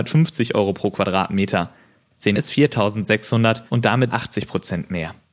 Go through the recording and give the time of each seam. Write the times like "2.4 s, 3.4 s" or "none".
2.3 s, 3.7 s, 4.1 s